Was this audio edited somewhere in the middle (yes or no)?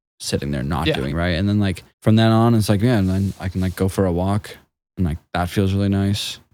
yes